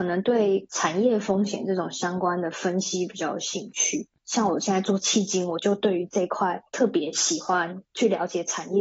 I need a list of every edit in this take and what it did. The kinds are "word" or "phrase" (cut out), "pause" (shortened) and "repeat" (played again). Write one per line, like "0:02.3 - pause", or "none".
0:04.2 - pause
0:06.7 - pause
0:07.9 - pause